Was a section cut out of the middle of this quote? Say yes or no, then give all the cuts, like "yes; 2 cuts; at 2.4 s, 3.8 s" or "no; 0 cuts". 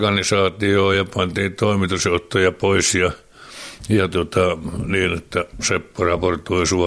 no; 0 cuts